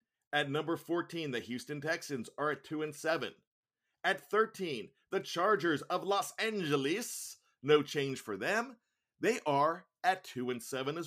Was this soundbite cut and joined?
no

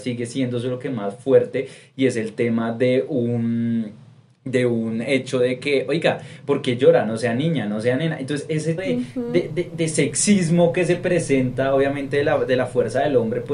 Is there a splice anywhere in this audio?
yes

